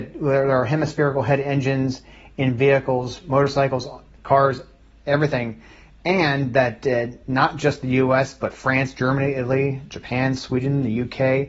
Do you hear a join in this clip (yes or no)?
no